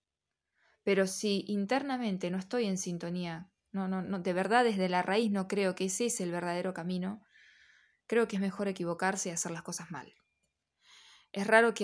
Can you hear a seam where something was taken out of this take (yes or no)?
no